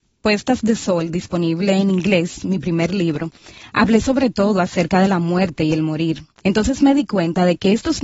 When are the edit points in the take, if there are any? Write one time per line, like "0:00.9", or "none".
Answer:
none